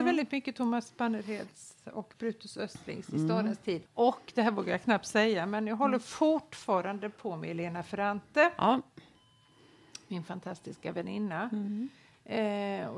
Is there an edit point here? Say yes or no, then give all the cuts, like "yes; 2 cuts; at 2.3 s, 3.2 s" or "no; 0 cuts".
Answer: yes; 1 cut; at 3.9 s